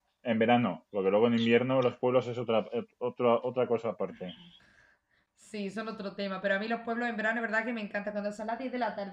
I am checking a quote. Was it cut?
no; 0 cuts

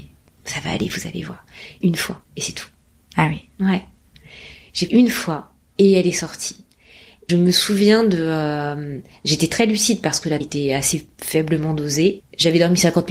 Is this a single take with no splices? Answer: no; 6 cuts; at 1.8 s, 2.2 s, 4.9 s, 5.7 s, 7.3 s, 10.4 s

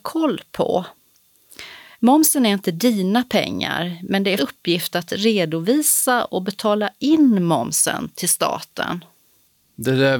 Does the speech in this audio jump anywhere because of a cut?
yes; 1 cut; at 4.4 s

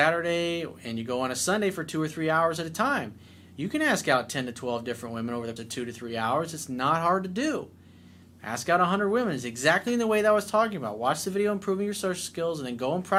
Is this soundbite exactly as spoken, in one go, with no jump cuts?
no; 1 cut; at 5.6 s

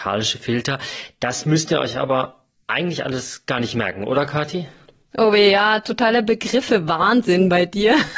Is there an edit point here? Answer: no; 0 cuts

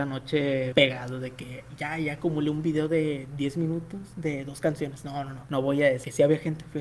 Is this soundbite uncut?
yes; 0 cuts

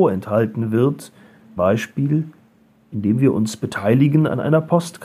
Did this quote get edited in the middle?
yes; 1 cut; at 1.6 s

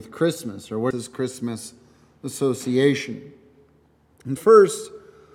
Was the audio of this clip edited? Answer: yes; 2 cuts; at 0.9 s, 4.4 s

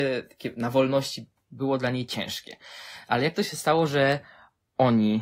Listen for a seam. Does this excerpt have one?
no; 0 cuts

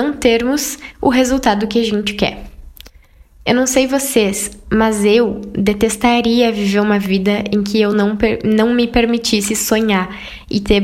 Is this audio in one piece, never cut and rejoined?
yes; 0 cuts

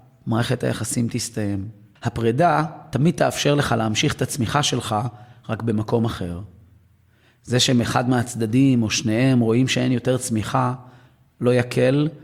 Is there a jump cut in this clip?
no; 0 cuts

